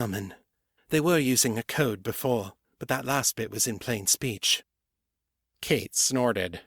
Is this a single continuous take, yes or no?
yes